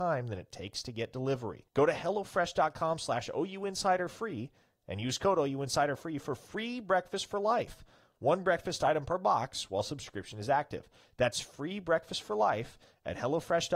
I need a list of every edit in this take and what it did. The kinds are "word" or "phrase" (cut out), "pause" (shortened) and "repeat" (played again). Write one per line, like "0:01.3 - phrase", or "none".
0:01.7 - pause